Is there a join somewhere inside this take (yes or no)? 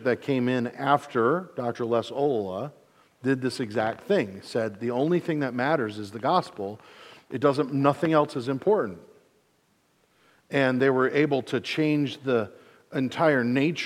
no